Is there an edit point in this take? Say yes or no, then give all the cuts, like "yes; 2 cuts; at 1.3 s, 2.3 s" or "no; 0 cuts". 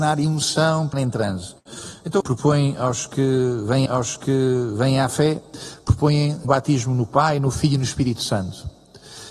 yes; 4 cuts; at 0.9 s, 2.2 s, 3.9 s, 6.4 s